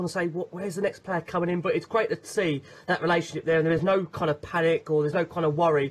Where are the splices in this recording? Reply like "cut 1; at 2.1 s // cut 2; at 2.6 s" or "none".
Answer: none